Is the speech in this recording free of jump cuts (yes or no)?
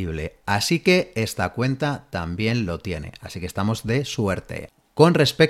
yes